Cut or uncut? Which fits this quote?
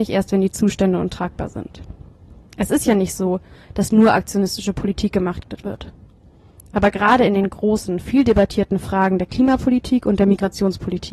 uncut